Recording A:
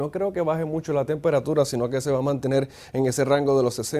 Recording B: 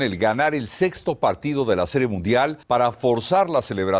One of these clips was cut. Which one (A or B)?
B